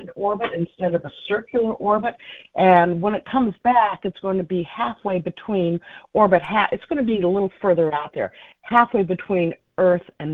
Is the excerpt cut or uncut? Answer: uncut